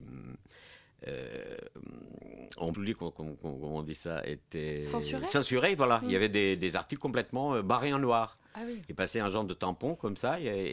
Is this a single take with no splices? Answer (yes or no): no